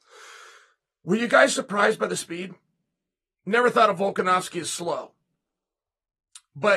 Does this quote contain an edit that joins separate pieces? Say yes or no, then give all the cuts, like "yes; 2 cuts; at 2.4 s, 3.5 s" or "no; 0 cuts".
no; 0 cuts